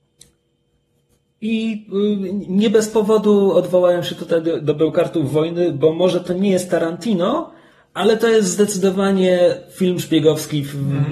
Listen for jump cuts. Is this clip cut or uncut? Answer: uncut